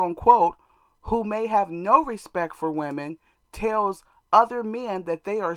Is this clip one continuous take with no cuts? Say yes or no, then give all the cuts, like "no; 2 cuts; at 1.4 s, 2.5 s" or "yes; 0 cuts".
yes; 0 cuts